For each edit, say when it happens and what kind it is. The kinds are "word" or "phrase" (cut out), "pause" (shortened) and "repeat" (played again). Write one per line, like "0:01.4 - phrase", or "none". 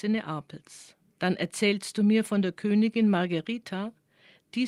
0:01.0 - pause